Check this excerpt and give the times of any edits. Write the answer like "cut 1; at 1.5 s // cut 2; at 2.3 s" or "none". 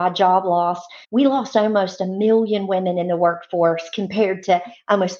cut 1; at 1.0 s